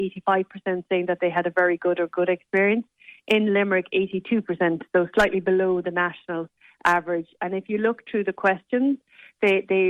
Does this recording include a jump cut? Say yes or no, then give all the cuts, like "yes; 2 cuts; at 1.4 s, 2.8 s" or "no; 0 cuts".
no; 0 cuts